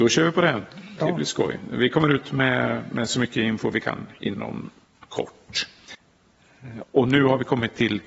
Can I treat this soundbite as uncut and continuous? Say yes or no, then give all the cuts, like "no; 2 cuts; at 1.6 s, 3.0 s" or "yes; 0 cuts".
yes; 0 cuts